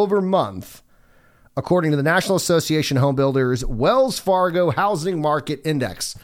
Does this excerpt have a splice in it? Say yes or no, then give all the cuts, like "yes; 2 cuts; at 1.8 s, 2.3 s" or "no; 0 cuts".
no; 0 cuts